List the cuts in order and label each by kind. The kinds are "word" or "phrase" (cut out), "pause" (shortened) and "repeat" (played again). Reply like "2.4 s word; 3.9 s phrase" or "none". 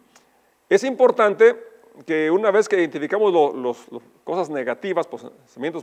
none

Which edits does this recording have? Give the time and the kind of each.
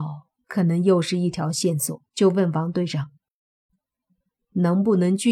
2.1 s pause

